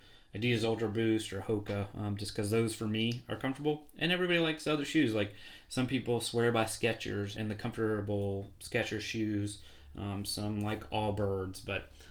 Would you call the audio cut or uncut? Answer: cut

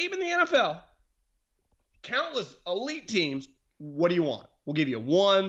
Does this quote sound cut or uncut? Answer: uncut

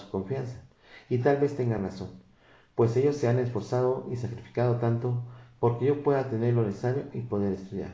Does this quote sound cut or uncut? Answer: uncut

